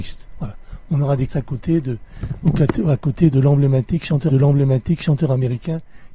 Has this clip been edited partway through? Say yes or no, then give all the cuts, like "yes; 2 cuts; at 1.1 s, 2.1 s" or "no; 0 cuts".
yes; 2 cuts; at 1.3 s, 4.3 s